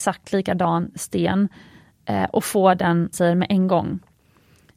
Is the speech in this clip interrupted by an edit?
yes; 1 cut; at 3.1 s

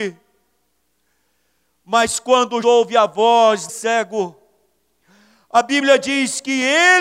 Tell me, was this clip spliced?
yes; 2 cuts; at 2.6 s, 3.7 s

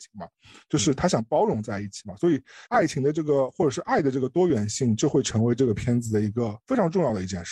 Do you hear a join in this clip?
yes; 2 cuts; at 2.7 s, 6.6 s

